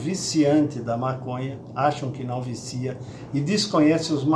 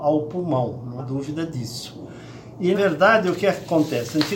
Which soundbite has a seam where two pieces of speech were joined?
second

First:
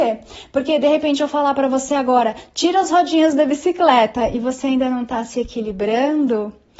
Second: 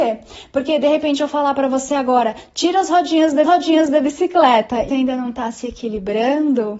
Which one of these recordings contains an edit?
second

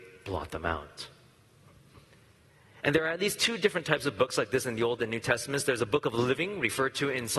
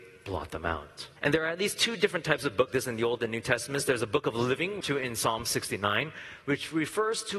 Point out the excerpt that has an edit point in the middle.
second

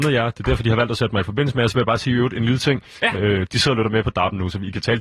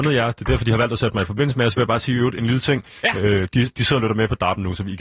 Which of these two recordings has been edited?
first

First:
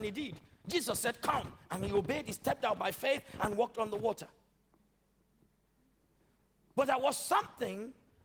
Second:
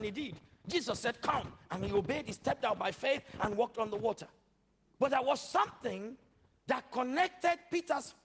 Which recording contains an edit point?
second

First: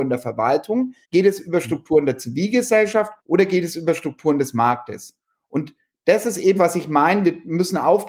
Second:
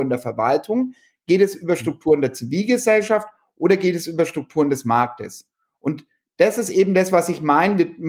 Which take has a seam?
first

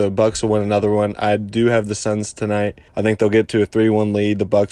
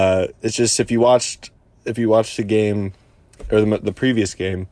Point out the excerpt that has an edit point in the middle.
first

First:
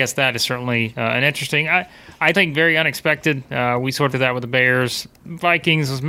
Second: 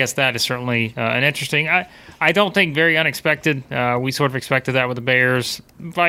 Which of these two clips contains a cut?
first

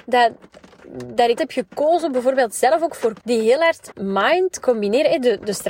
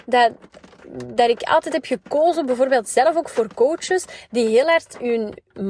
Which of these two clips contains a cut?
first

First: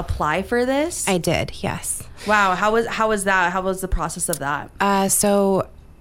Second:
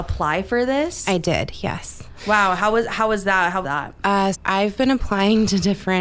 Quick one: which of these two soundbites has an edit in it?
second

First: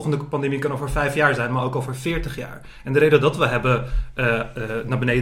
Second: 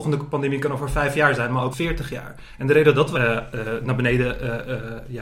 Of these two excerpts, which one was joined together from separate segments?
second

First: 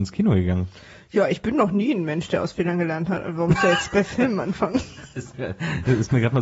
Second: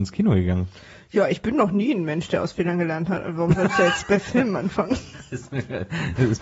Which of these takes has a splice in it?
first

